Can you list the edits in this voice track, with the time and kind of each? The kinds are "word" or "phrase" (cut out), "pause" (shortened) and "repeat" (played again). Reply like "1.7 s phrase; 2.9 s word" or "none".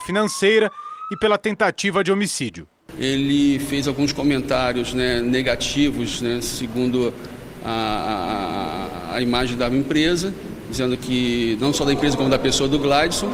none